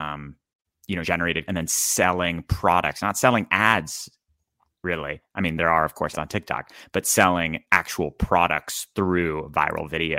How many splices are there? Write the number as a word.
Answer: three